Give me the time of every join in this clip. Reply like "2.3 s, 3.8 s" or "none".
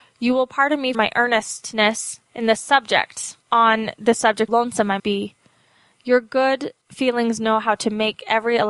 0.9 s, 2.3 s, 3.4 s, 4.5 s, 5.0 s, 6.8 s

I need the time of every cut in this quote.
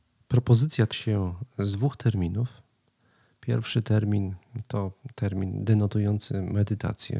0.9 s

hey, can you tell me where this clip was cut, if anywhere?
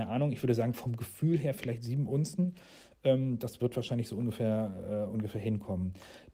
none

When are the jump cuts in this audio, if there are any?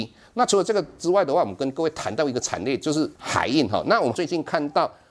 3.2 s

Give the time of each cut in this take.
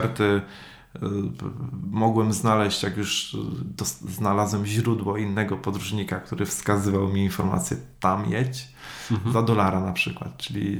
none

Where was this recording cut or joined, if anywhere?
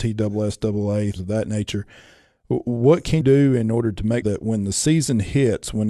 1.2 s, 3.2 s, 4.2 s

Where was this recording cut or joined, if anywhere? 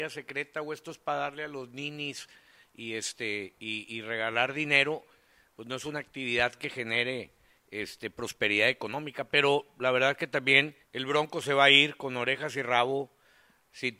10.8 s

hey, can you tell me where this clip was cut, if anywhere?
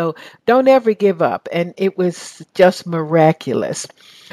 none

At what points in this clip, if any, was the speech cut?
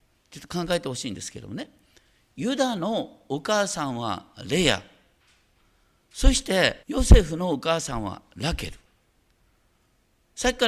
6.8 s

